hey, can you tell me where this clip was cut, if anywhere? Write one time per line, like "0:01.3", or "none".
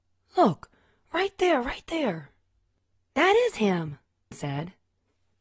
0:04.3